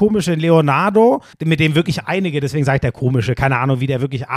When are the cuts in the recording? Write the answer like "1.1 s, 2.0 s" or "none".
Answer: 1.3 s